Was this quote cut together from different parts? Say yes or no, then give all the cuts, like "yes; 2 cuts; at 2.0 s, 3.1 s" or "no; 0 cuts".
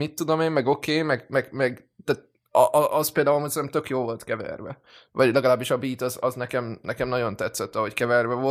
no; 0 cuts